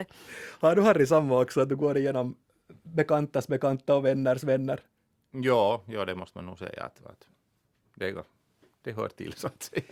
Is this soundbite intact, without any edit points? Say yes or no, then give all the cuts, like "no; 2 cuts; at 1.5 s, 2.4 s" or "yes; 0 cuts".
yes; 0 cuts